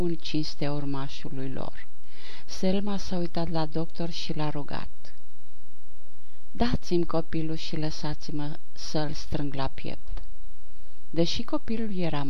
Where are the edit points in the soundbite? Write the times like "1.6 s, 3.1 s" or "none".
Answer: none